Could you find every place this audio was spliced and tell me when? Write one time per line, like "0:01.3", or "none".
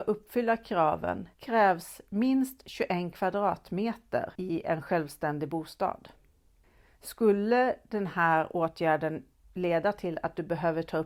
0:01.3
0:04.4
0:06.6